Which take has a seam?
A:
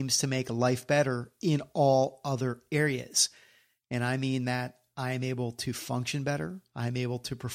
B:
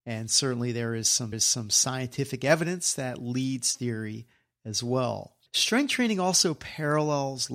B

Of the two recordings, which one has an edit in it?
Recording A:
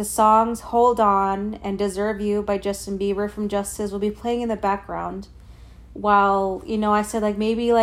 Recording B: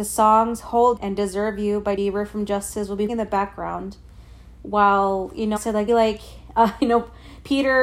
B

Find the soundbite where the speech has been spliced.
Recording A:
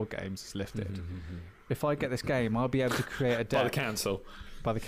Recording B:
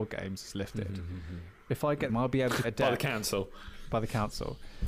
B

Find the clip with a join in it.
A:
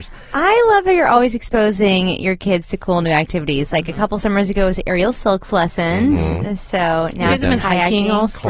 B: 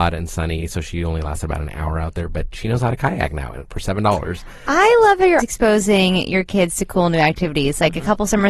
B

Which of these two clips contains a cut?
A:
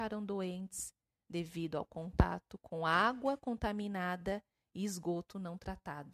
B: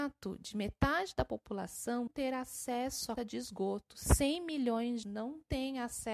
B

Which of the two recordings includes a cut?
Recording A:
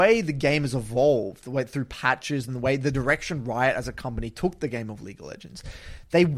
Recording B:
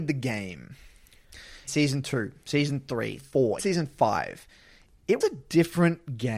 B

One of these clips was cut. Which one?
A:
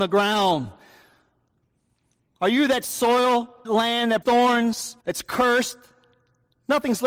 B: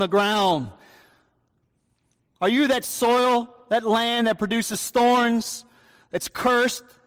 A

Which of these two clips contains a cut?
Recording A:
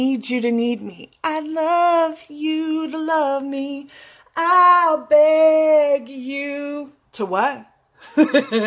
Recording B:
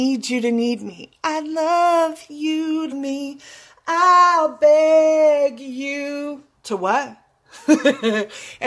B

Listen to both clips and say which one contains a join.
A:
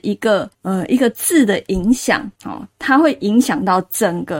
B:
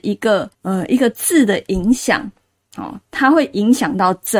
A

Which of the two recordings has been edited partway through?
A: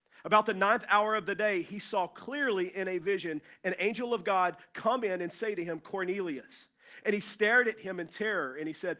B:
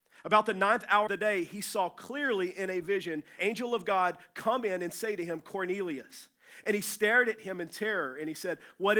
B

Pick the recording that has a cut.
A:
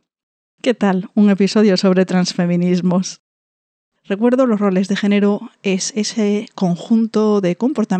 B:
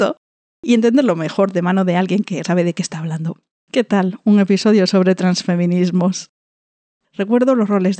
B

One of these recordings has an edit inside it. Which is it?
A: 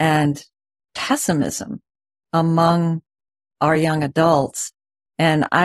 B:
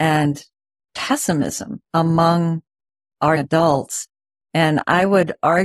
B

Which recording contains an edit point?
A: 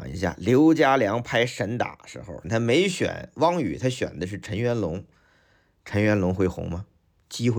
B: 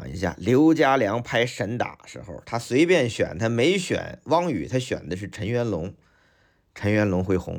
A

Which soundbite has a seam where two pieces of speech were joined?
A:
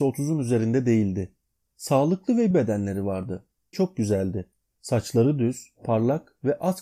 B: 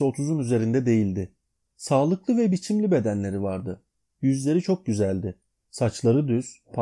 A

